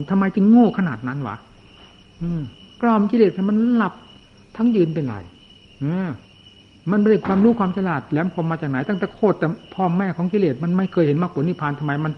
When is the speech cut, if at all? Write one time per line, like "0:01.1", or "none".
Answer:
none